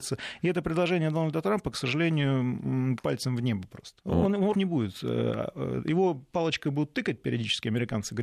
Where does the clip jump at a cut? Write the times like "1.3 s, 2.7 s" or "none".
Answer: 3.0 s, 4.0 s, 4.5 s